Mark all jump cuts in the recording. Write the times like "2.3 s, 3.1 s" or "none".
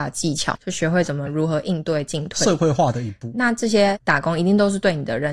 3.3 s